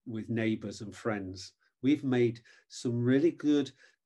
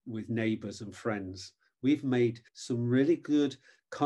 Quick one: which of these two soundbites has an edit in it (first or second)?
second